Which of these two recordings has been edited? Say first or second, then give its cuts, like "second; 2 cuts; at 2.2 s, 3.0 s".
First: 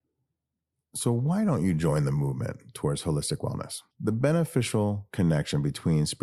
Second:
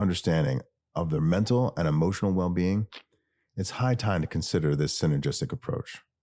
first; 1 cut; at 3.9 s